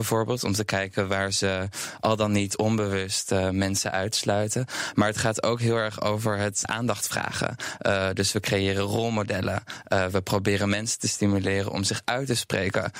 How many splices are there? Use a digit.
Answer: 1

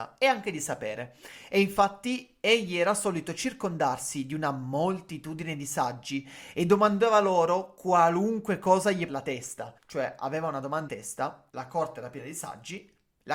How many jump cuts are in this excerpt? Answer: 4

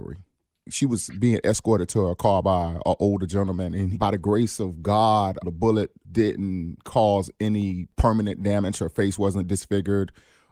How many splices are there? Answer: 0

